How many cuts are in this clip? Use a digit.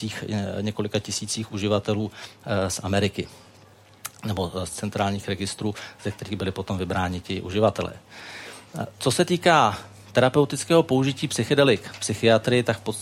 1